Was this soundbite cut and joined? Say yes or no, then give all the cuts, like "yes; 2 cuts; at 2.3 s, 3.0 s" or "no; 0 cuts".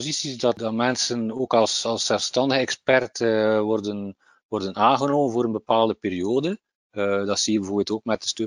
no; 0 cuts